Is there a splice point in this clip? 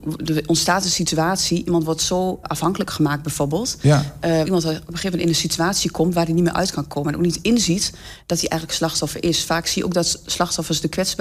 yes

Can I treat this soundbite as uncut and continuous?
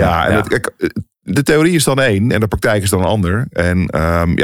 yes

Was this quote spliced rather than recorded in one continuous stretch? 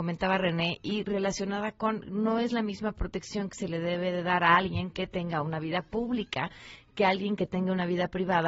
no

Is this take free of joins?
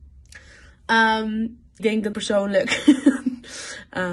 no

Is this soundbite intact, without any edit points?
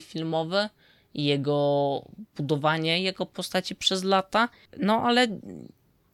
yes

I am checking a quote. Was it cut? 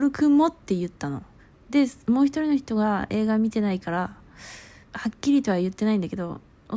yes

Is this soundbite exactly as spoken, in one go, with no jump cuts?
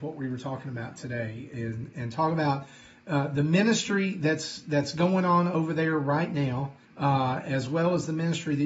no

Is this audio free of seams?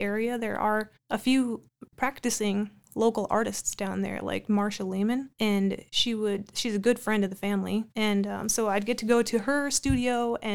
no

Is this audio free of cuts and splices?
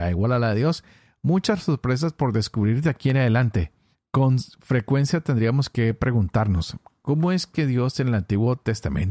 yes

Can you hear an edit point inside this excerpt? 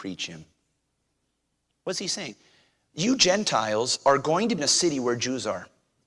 yes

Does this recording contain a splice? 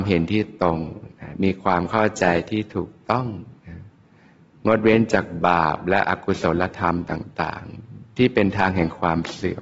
yes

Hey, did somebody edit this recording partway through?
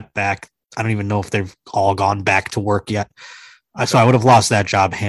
no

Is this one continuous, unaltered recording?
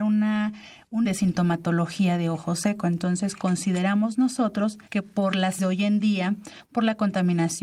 no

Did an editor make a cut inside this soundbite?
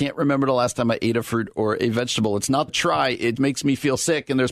yes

